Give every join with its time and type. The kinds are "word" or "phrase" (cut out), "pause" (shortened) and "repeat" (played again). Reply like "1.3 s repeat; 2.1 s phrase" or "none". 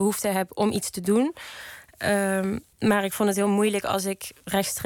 2.7 s pause